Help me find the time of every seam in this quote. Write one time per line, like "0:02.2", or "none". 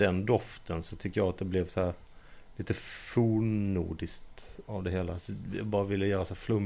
none